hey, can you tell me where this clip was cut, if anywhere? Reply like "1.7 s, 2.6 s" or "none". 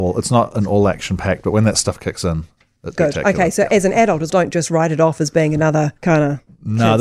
2.9 s, 4.3 s, 6.0 s